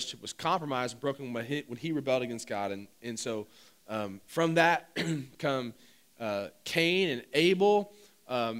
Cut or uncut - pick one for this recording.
uncut